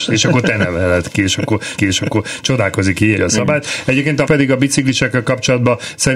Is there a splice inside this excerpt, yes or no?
yes